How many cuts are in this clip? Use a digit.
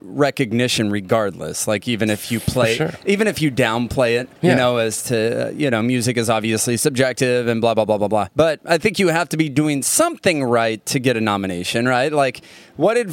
2